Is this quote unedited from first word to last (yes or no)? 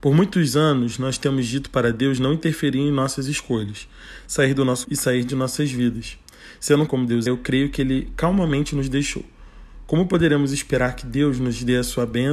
no